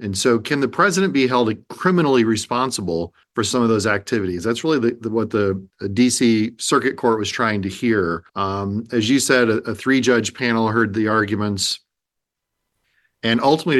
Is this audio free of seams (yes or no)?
no